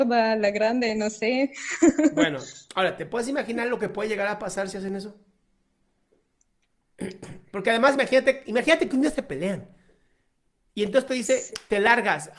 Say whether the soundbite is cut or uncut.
uncut